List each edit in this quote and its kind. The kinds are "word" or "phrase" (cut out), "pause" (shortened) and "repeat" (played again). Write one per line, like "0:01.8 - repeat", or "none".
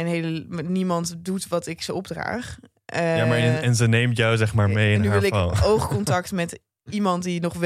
none